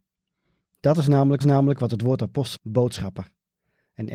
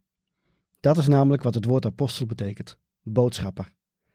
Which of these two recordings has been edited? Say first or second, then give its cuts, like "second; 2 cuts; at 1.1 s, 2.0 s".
first; 2 cuts; at 1.4 s, 2.6 s